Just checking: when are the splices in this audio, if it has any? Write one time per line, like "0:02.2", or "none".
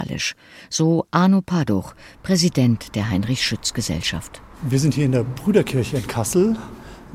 none